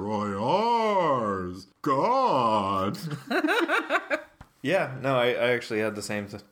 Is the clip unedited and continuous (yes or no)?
no